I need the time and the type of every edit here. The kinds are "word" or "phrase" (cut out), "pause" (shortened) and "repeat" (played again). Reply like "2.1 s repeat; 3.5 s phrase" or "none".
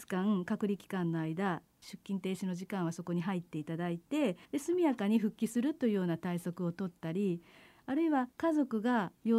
4.4 s pause; 8.3 s pause